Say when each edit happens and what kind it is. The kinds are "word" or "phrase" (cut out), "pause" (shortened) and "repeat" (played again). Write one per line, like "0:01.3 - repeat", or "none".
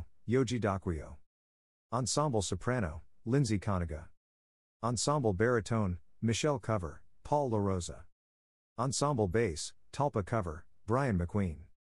none

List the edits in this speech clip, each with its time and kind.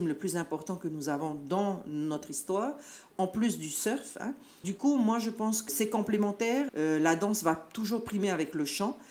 0:03.1 - word
0:04.6 - word
0:05.7 - word
0:06.7 - word

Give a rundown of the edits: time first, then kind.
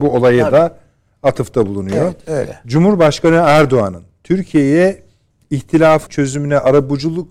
0:06.1 - word

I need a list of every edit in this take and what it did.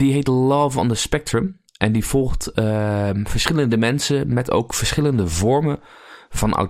0:01.7 - pause

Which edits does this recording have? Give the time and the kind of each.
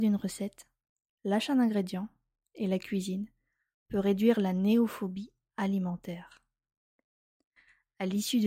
none

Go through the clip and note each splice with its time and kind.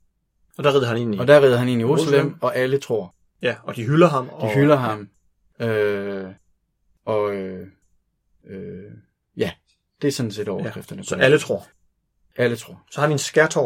none

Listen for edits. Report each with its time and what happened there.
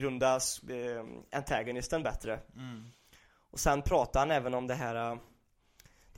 none

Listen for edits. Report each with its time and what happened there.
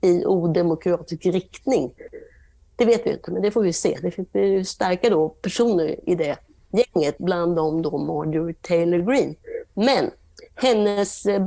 none

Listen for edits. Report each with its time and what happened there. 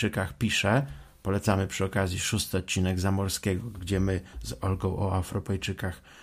none

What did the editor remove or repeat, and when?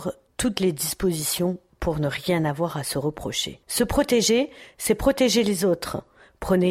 0:03.6 - pause

